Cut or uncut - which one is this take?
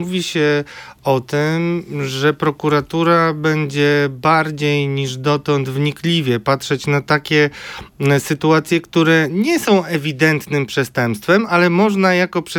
uncut